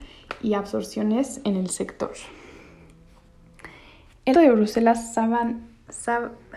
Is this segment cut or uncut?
cut